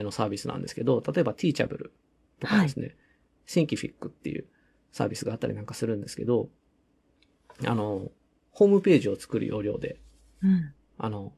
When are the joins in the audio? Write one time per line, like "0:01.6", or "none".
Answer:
none